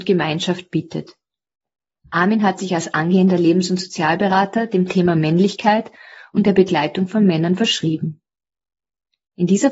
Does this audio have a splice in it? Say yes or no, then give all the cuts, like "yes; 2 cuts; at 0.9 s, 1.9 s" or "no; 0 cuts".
no; 0 cuts